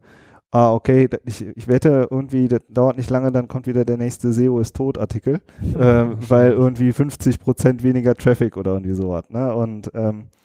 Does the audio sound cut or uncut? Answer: cut